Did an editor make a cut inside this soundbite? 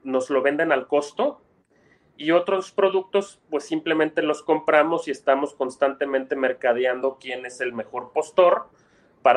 no; 0 cuts

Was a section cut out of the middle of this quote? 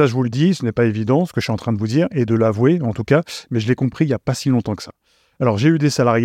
no; 0 cuts

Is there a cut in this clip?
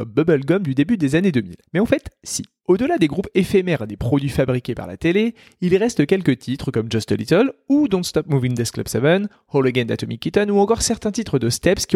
no; 0 cuts

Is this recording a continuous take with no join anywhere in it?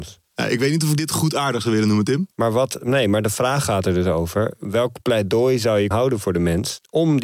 no; 2 cuts; at 2.3 s, 5.9 s

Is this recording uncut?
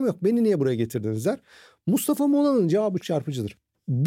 no; 1 cut; at 3.0 s

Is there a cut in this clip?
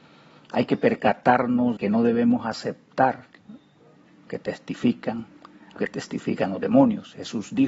yes; 3 cuts; at 1.8 s, 4.3 s, 5.8 s

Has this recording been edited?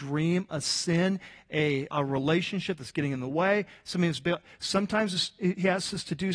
yes; 1 cut; at 1.9 s

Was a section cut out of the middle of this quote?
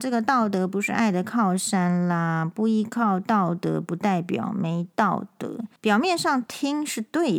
yes; 1 cut; at 5.8 s

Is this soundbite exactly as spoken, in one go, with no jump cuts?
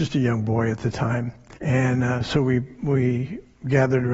no; 1 cut; at 1.6 s

